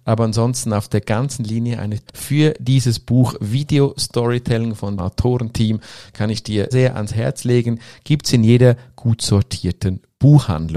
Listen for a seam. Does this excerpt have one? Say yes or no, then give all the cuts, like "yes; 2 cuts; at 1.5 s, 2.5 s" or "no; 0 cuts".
yes; 3 cuts; at 2.1 s, 5.0 s, 6.7 s